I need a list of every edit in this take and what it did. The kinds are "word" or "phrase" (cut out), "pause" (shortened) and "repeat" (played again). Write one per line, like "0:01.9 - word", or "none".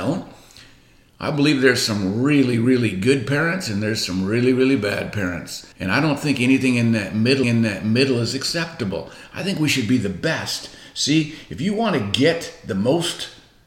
0:05.7 - pause
0:07.4 - repeat